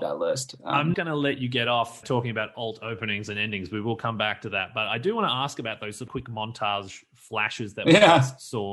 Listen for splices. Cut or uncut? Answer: cut